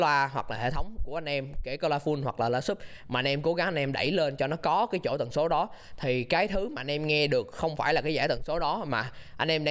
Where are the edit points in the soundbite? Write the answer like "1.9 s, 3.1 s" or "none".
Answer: none